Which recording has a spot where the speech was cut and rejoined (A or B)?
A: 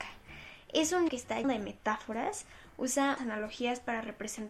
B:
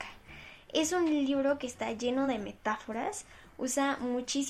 A